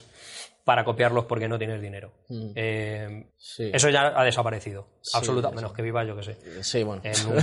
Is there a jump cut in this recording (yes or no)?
yes